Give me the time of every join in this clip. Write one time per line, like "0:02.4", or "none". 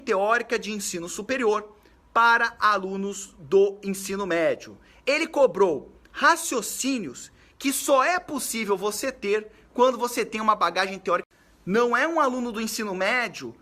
none